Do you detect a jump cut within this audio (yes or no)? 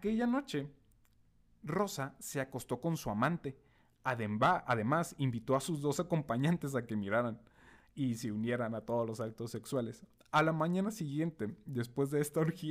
no